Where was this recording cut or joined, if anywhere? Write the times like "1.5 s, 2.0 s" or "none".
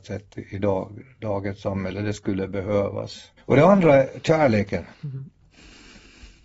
3.4 s, 4.9 s